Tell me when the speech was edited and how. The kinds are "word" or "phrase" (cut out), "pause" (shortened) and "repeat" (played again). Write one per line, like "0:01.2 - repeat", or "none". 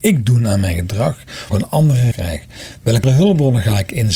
0:01.5 - word
0:02.1 - word
0:03.0 - word